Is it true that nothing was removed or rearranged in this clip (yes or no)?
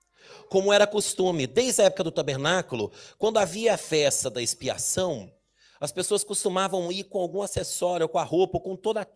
yes